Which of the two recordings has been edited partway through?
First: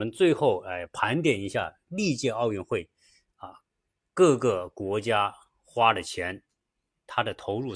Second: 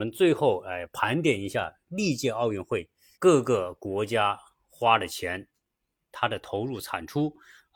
second; 1 cut; at 3.1 s

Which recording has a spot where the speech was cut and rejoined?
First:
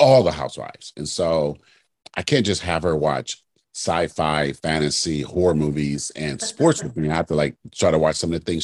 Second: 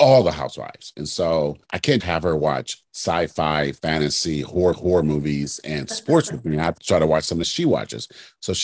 second; 6 cuts; at 1.6 s, 2.0 s, 2.9 s, 4.7 s, 6.8 s, 7.4 s

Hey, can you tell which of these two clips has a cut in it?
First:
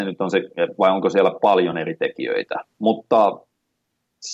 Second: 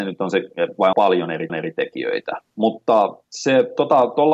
second; 3 cuts; at 0.9 s, 1.5 s, 3.2 s

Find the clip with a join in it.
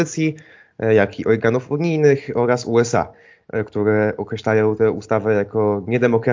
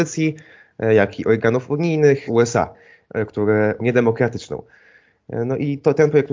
second; 2 cuts; at 2.3 s, 3.8 s

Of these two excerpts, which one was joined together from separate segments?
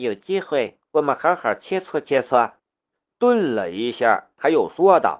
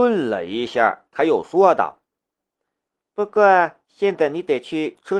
first; 1 cut; at 2.6 s

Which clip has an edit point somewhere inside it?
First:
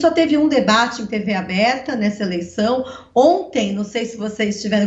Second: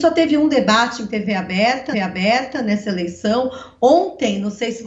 second; 1 cut; at 1.9 s

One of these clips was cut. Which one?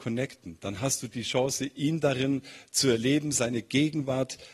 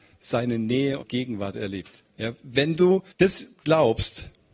second; 3 cuts; at 1.0 s, 2.1 s, 3.1 s

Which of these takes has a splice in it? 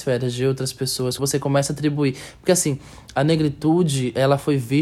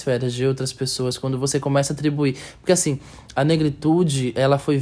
first; 1 cut; at 1.2 s

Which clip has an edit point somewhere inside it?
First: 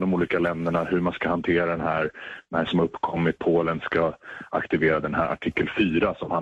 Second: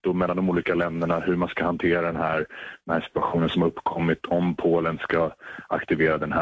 first; 2 cuts; at 2.7 s, 3.4 s

